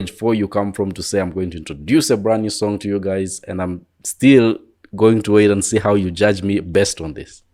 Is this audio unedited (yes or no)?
yes